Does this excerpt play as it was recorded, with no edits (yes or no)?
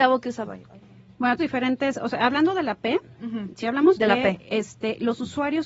no